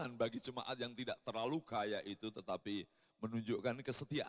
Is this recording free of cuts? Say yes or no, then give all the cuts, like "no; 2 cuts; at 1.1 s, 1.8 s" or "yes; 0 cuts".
yes; 0 cuts